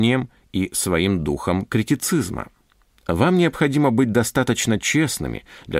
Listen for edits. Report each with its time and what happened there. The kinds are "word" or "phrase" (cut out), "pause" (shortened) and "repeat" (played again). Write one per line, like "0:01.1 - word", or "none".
none